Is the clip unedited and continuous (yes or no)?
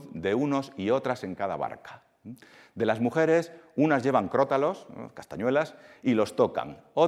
yes